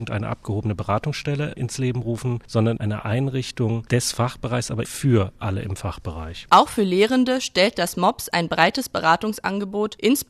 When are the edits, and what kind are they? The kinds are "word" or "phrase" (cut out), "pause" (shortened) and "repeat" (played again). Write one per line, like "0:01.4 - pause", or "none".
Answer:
0:02.8 - word
0:04.8 - word